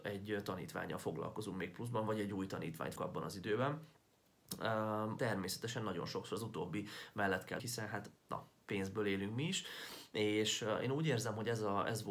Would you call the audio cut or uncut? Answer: cut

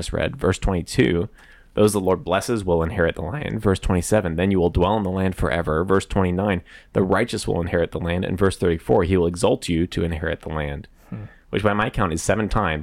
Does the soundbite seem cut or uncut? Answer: uncut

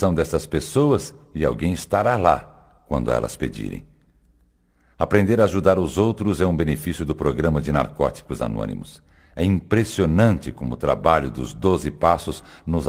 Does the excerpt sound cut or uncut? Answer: uncut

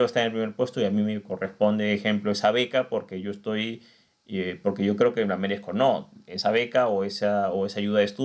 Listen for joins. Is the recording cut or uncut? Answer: uncut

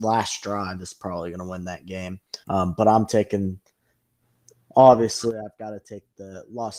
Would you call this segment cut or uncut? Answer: cut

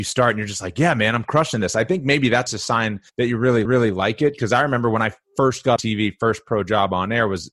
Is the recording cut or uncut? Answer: cut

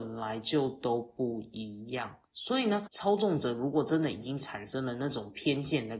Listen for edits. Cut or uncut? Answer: cut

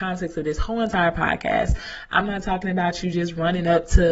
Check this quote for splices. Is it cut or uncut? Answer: uncut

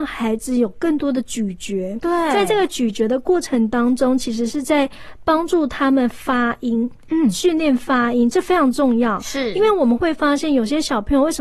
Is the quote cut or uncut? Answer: uncut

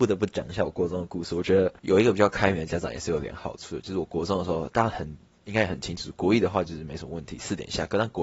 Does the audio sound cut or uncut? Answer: cut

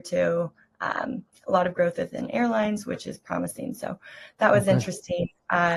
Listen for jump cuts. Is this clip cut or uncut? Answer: uncut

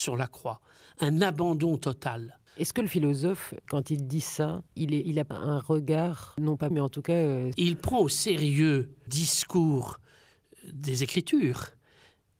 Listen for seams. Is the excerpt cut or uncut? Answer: cut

